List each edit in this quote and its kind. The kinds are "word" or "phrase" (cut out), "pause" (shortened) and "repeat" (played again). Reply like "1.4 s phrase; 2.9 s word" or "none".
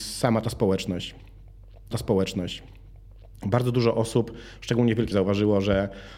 1.9 s repeat; 5.1 s word